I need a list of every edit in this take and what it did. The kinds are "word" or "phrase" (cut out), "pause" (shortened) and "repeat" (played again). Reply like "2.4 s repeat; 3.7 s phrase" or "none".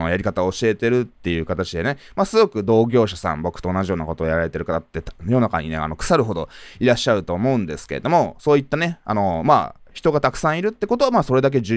none